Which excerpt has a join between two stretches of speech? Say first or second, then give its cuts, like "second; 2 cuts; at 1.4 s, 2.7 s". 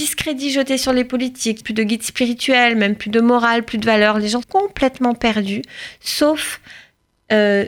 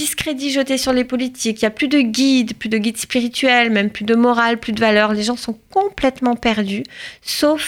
first; 2 cuts; at 1.6 s, 4.4 s